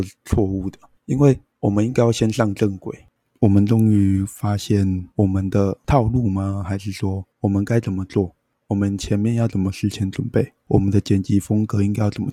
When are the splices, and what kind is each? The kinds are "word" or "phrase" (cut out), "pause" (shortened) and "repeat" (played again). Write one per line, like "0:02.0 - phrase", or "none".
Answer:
0:05.1 - pause
0:07.3 - pause